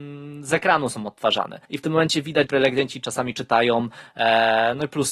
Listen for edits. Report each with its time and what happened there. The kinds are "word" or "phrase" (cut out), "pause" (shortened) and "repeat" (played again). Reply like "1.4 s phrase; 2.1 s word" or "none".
1.6 s pause; 2.5 s word

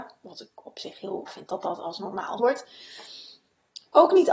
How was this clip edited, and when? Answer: 1.3 s word; 2.4 s word

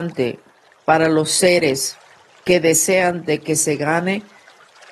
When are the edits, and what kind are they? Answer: none

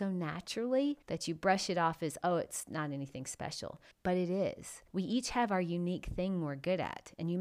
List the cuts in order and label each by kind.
1.0 s pause; 3.9 s pause; 4.9 s pause

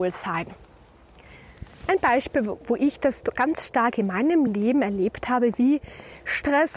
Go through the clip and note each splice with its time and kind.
none

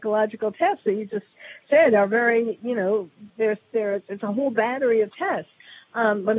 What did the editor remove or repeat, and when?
none

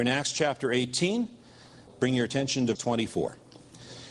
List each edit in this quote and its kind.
1.9 s word; 2.7 s word

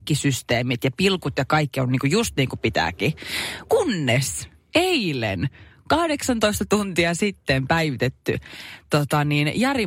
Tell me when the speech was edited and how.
none

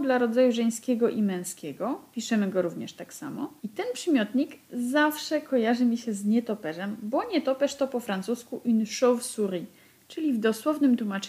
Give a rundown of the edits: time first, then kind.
3.6 s pause

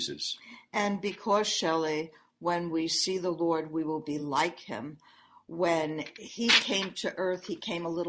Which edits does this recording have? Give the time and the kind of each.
none

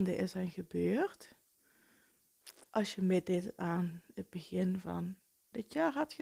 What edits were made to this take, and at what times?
2.7 s pause

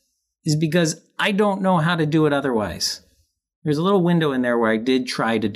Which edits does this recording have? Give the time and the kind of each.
none

